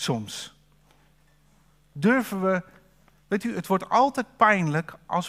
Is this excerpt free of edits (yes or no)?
yes